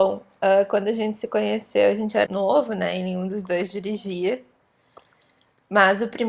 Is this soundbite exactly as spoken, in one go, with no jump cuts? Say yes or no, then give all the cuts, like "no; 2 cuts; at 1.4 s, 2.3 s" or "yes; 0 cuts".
no; 1 cut; at 2.3 s